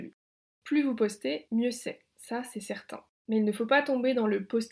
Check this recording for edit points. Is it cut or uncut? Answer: uncut